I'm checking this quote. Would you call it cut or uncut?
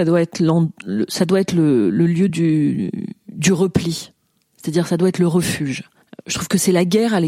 uncut